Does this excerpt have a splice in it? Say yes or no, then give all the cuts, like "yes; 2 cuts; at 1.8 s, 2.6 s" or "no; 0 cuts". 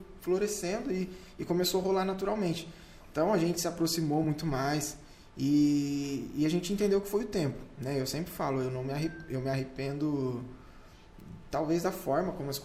no; 0 cuts